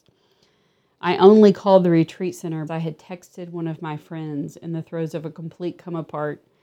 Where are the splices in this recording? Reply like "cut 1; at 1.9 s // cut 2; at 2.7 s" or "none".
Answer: cut 1; at 2.7 s